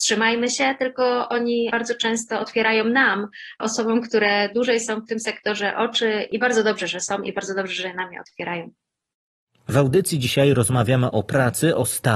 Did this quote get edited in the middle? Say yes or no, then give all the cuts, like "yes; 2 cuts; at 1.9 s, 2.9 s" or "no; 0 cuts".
no; 0 cuts